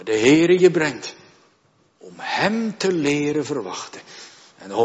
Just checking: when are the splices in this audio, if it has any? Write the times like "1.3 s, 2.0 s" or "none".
none